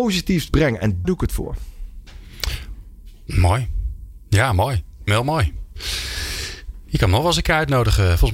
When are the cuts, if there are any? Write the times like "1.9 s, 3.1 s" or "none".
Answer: 1.0 s, 5.1 s